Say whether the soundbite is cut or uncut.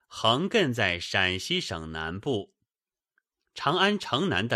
uncut